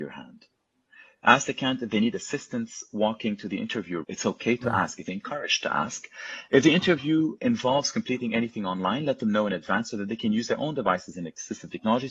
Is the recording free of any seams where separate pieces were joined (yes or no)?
no